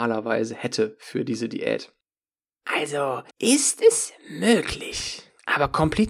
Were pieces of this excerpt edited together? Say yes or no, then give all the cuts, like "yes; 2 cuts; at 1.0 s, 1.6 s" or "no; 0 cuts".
yes; 1 cut; at 3.3 s